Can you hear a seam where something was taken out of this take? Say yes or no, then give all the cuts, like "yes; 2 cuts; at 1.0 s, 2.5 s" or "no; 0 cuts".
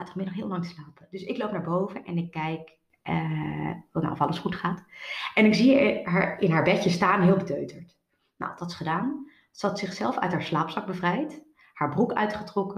no; 0 cuts